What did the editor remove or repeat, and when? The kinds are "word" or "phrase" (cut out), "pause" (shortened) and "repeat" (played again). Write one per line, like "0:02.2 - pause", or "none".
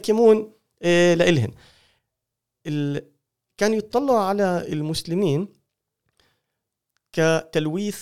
none